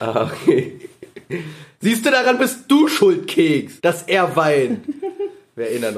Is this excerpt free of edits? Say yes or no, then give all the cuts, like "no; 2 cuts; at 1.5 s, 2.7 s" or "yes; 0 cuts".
no; 1 cut; at 3.8 s